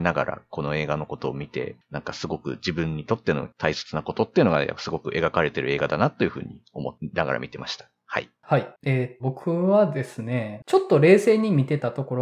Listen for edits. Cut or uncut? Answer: cut